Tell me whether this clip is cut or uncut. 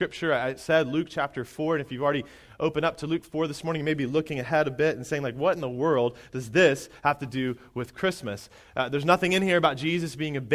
uncut